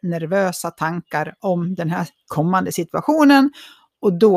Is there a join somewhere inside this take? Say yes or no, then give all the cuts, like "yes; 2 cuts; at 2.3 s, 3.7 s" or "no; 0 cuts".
no; 0 cuts